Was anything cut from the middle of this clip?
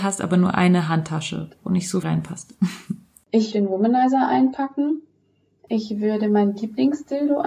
yes; 2 cuts; at 2.0 s, 3.5 s

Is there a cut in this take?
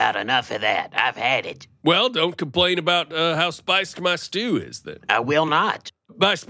no; 0 cuts

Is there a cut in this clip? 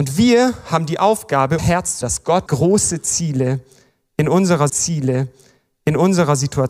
yes; 4 cuts; at 1.6 s, 2.0 s, 2.5 s, 4.7 s

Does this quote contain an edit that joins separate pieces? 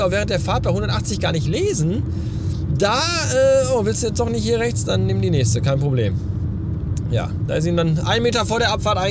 no; 0 cuts

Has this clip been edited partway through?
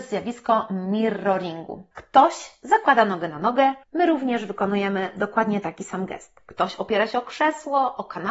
yes; 2 cuts; at 1.9 s, 3.8 s

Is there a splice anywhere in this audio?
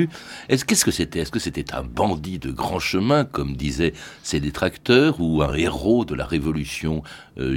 no; 0 cuts

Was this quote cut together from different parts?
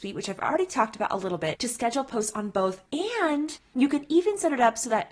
no; 0 cuts

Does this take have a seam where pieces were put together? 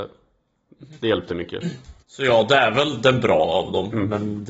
yes; 1 cut; at 2.0 s

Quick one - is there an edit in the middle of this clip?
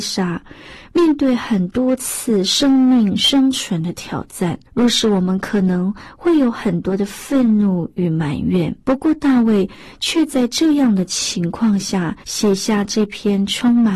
yes; 3 cuts; at 4.7 s, 8.8 s, 12.2 s

